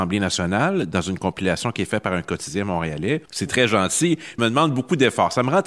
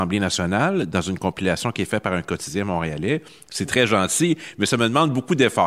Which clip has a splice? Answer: first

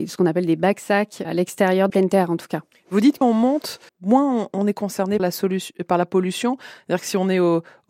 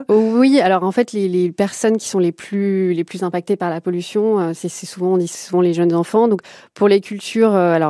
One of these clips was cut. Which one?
first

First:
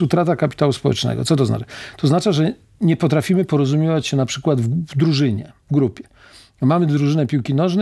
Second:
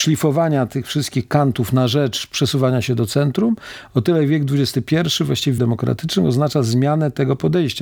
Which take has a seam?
second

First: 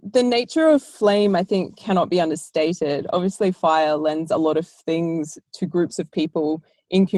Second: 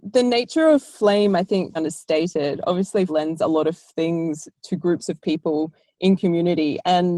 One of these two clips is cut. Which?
second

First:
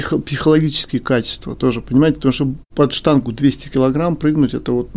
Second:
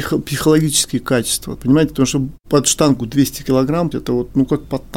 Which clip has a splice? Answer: second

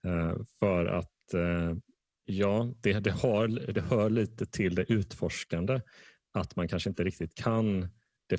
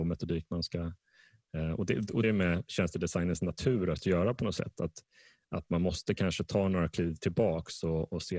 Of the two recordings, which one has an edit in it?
second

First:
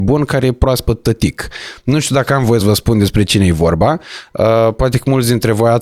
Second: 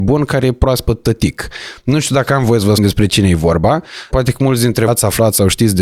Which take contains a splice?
second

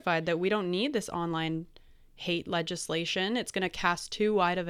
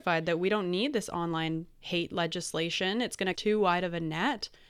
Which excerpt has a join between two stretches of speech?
second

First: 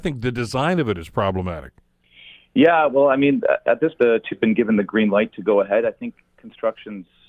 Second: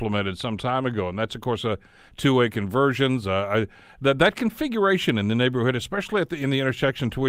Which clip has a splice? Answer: first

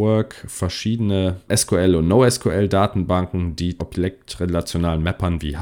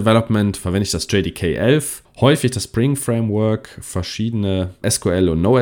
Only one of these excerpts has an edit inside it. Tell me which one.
first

